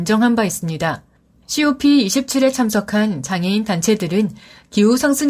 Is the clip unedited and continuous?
yes; 0 cuts

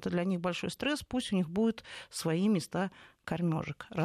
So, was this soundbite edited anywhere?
no; 0 cuts

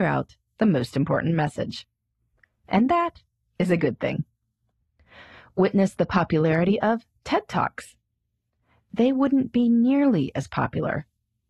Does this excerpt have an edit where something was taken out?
no; 0 cuts

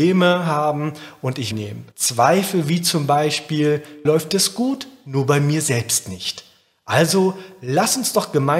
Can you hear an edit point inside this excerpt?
yes; 3 cuts; at 1.5 s, 1.9 s, 4.0 s

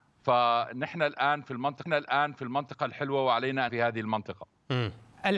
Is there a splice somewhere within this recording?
yes; 2 cuts; at 1.9 s, 3.7 s

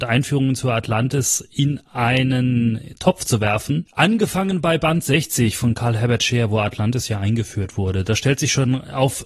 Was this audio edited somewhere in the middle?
yes; 1 cut; at 3.9 s

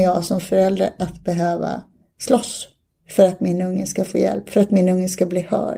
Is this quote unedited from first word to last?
yes; 0 cuts

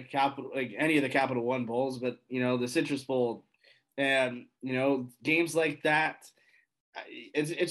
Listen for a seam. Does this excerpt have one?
no; 0 cuts

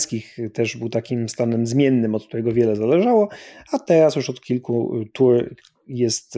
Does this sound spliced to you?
no; 0 cuts

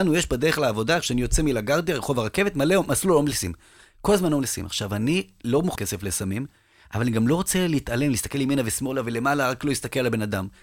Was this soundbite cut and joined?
yes; 1 cut; at 5.8 s

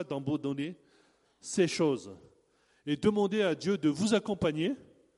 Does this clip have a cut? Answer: no; 0 cuts

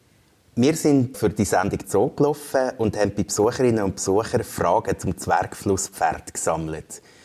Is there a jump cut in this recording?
yes; 2 cuts; at 1.1 s, 1.8 s

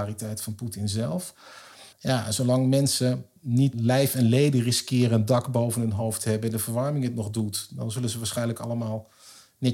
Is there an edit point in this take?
yes; 2 cuts; at 1.9 s, 3.4 s

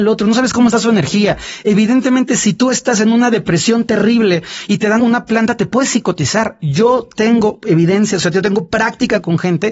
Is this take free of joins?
no; 1 cut; at 5.0 s

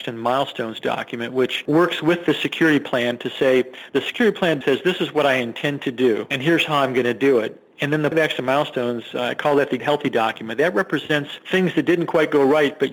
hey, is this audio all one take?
no; 3 cuts; at 4.6 s, 8.1 s, 9.8 s

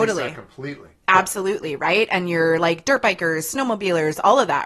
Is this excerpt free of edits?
yes; 0 cuts

